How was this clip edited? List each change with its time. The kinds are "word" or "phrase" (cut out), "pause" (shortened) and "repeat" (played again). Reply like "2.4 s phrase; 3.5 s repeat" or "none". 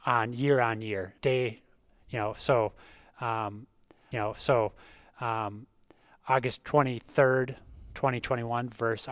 1.2 s pause; 4.1 s repeat